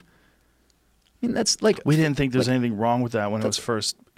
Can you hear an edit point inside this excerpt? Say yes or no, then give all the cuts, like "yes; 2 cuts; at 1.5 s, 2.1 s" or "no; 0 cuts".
no; 0 cuts